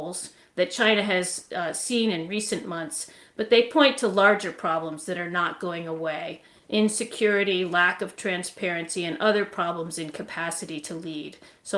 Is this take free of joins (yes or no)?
yes